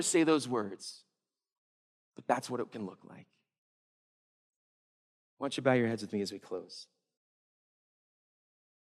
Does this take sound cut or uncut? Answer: uncut